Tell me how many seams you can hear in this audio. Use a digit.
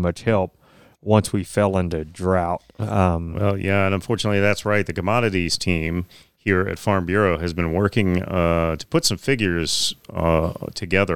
0